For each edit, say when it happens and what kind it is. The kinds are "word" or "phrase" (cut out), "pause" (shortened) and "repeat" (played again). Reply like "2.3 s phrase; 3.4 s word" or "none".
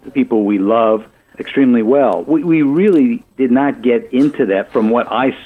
1.3 s word; 3.3 s pause

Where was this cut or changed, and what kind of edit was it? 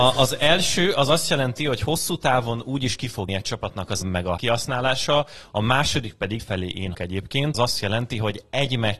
3.3 s word; 4.0 s word; 4.4 s word; 6.4 s word; 6.9 s word; 7.5 s word

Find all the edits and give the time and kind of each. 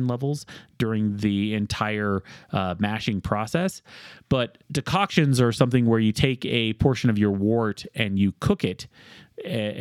4.6 s pause

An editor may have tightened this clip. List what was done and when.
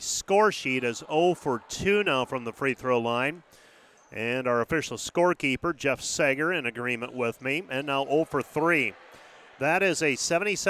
none

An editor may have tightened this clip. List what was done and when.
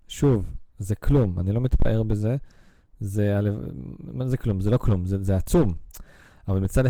none

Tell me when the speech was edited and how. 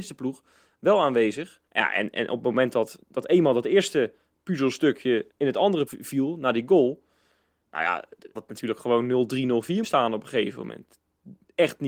1.7 s pause; 3.0 s word; 5.3 s pause; 5.9 s word; 8.4 s word; 9.8 s word

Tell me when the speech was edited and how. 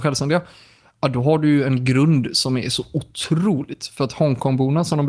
none

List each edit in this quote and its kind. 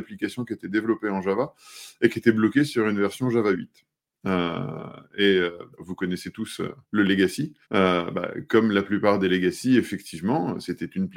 5.7 s pause; 6.8 s pause; 7.6 s pause

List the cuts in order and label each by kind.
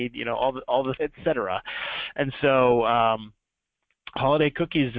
1.0 s phrase

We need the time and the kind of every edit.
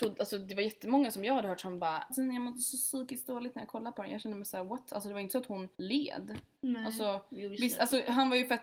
2.1 s word; 5.7 s pause

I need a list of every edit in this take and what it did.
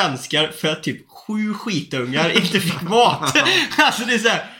none

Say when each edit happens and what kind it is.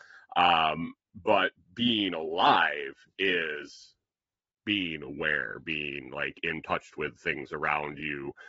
none

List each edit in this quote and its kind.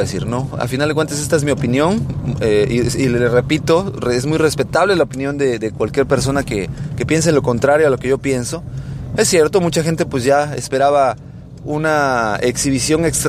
none

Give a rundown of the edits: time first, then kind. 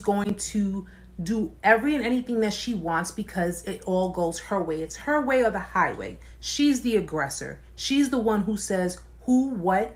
none

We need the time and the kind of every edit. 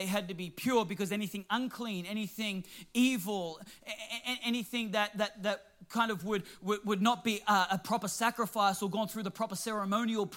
none

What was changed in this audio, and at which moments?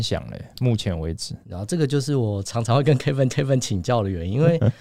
1.4 s pause; 3.3 s repeat

